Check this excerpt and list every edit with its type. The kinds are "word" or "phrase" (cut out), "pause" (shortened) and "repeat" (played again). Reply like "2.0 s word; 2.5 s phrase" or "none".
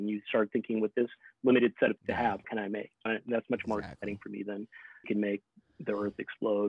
2.0 s word; 2.4 s word; 3.1 s word; 5.0 s word